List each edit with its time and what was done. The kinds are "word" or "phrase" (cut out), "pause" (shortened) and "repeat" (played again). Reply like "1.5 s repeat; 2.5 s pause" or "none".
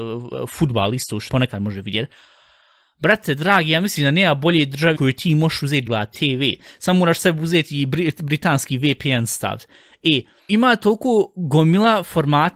1.3 s word; 4.9 s word; 5.9 s word; 10.5 s word